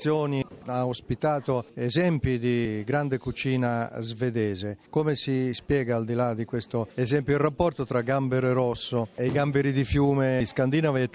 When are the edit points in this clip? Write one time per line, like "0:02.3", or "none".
none